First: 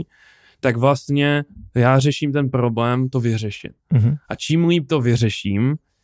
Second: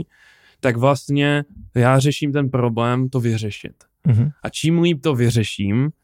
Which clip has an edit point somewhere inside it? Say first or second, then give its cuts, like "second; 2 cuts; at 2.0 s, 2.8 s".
first; 1 cut; at 3.8 s